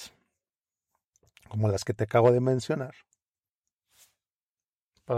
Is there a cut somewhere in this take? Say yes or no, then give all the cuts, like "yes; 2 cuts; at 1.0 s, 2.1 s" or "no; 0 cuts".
no; 0 cuts